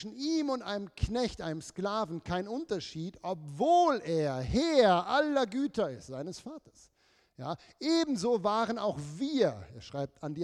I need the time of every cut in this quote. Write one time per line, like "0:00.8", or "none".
none